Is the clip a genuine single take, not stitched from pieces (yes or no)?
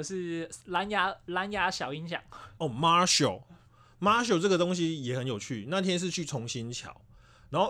yes